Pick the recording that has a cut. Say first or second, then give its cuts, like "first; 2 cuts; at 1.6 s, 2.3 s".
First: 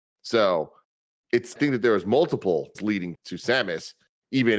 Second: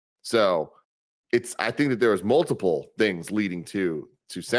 first; 3 cuts; at 1.6 s, 2.7 s, 3.1 s